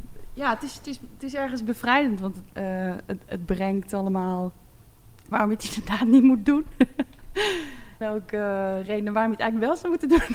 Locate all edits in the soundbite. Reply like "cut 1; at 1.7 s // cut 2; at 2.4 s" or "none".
cut 1; at 2.5 s // cut 2; at 5.3 s // cut 3; at 8.0 s